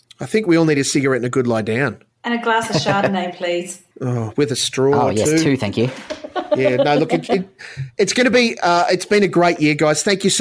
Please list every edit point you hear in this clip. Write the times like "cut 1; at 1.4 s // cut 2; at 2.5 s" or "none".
cut 1; at 2.1 s // cut 2; at 3.9 s